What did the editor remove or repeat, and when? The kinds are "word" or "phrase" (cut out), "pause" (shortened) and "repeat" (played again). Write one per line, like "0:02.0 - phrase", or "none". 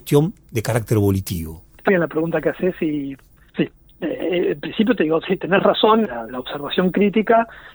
0:01.9 - word
0:03.5 - word
0:06.0 - word

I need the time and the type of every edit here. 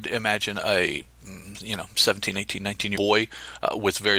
0:03.0 - word

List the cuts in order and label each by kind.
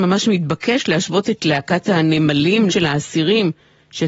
0:02.7 - word

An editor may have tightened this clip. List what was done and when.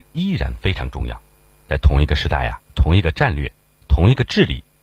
0:02.6 - word

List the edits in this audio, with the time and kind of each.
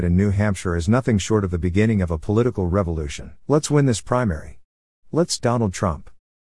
0:03.4 - pause
0:05.4 - word

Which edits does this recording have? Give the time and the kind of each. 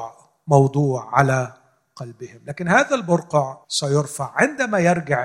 0:03.6 - pause

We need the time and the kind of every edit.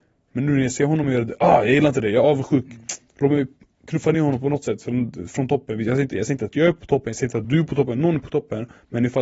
none

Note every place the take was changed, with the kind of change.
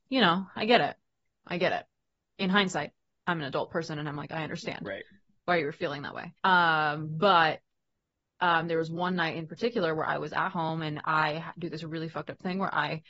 0:06.4 - pause

